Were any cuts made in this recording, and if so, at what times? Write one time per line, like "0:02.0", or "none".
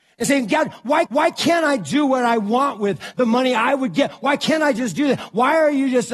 0:01.1